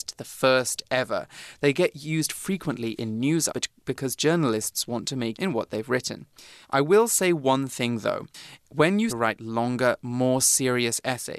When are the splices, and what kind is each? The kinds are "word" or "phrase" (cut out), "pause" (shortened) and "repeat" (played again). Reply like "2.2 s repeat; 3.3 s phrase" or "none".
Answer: 3.5 s word; 5.3 s phrase; 6.6 s pause; 9.1 s phrase